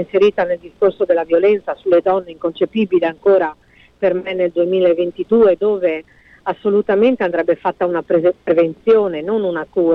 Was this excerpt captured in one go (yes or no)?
yes